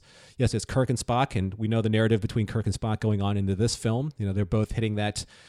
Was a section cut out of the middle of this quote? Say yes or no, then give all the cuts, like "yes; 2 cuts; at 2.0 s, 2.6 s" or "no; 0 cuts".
no; 0 cuts